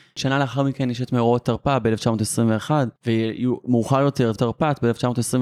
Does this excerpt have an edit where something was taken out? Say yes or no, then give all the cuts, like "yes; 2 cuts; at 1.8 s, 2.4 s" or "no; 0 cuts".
yes; 2 cuts; at 3.0 s, 4.4 s